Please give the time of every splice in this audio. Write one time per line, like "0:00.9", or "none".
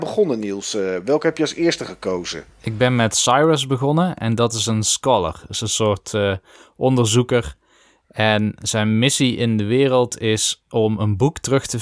none